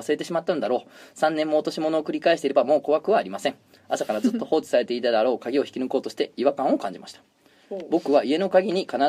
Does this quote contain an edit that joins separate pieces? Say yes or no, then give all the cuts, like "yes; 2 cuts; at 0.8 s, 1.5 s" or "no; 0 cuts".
no; 0 cuts